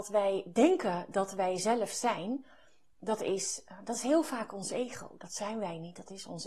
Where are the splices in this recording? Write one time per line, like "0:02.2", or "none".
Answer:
none